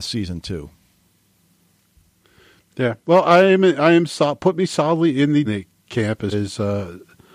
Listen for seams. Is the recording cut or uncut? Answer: cut